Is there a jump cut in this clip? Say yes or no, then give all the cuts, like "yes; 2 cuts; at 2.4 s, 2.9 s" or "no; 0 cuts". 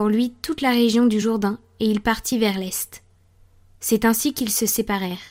no; 0 cuts